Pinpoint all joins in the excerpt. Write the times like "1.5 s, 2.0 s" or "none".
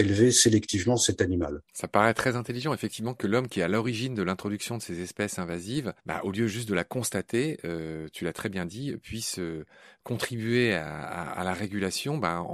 1.7 s, 6.0 s